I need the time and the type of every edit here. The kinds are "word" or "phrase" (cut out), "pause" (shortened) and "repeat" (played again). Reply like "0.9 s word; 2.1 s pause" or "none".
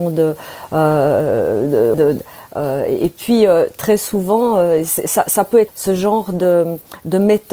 1.9 s word; 5.7 s word